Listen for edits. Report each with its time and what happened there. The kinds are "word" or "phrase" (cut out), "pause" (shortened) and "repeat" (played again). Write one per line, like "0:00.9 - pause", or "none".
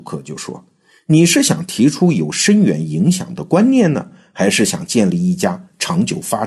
none